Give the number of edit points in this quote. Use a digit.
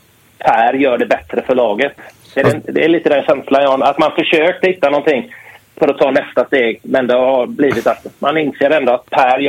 0